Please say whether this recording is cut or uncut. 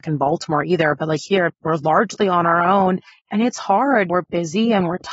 uncut